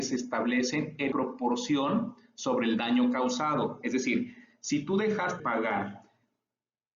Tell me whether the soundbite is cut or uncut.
cut